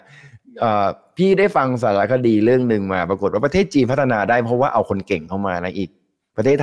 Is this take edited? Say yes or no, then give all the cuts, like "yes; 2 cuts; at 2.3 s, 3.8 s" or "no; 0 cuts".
no; 0 cuts